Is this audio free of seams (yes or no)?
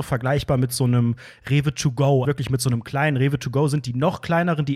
no